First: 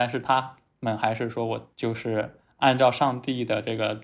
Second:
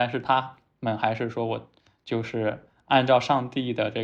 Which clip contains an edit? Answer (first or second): first